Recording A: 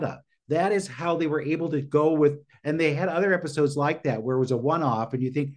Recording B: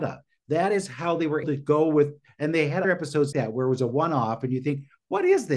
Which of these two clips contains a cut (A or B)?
B